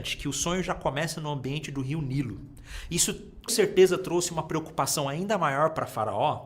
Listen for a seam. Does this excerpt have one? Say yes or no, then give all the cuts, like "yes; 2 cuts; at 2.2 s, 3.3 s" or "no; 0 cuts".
yes; 1 cut; at 3.5 s